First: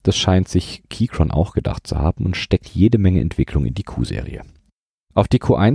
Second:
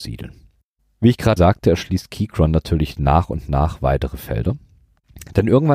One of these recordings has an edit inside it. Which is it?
second; 1 cut; at 1.4 s

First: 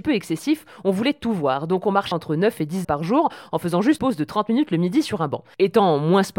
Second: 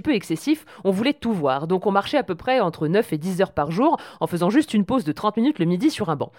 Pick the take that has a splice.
first; 3 cuts; at 2.1 s, 2.8 s, 4.0 s

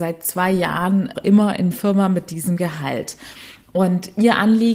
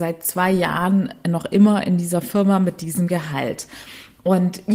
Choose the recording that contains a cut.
first; 2 cuts; at 1.1 s, 1.7 s

